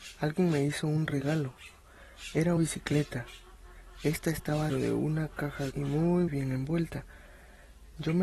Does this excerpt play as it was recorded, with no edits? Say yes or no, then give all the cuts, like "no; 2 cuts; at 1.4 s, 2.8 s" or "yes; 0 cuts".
no; 4 cuts; at 2.6 s, 4.7 s, 5.7 s, 6.3 s